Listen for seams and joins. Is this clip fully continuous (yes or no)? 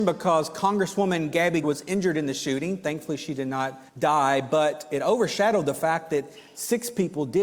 no